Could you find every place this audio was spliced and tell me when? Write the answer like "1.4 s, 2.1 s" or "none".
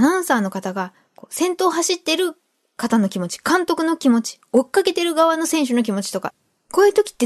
none